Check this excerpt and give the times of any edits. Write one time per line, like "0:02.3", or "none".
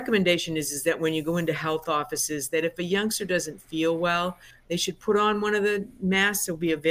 none